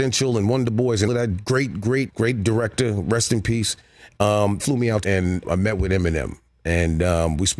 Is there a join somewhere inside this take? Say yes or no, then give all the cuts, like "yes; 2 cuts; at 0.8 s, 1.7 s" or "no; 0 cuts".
yes; 5 cuts; at 1.1 s, 2.1 s, 4.6 s, 5.0 s, 5.4 s